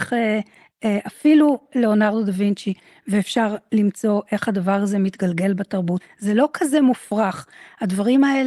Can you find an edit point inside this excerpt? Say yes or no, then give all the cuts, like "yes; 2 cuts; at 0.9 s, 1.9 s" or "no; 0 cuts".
no; 0 cuts